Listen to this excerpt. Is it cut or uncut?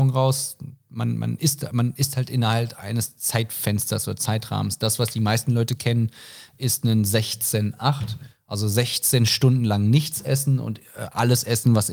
uncut